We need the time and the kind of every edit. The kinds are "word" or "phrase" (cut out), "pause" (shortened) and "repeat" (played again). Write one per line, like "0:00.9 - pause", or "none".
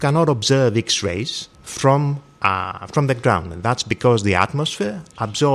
0:01.5 - pause